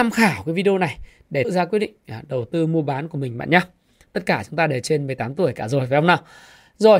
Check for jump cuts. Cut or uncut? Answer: cut